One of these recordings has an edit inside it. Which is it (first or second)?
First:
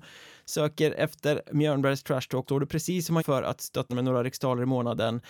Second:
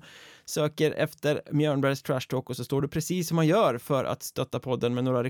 first